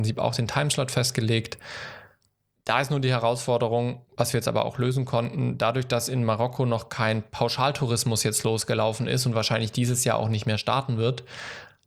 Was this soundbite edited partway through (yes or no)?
no